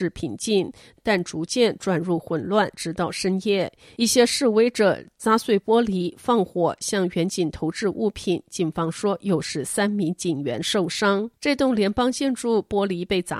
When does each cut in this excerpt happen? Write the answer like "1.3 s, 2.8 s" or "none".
11.4 s